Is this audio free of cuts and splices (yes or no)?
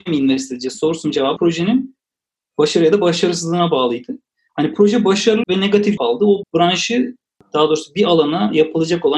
no